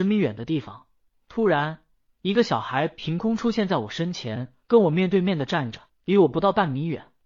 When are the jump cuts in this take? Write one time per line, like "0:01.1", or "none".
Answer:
0:04.6
0:05.9